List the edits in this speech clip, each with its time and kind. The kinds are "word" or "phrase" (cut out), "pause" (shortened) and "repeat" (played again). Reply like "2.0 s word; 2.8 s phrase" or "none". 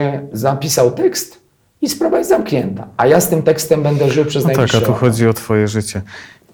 none